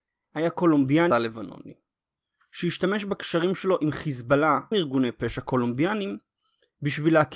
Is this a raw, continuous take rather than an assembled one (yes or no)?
no